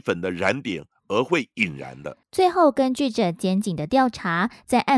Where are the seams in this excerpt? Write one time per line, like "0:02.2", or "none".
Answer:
0:02.2